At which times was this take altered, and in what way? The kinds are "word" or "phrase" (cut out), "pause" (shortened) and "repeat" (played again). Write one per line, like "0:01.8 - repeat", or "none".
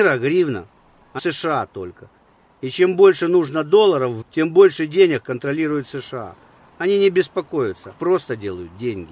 0:01.2 - word
0:04.2 - word
0:08.0 - word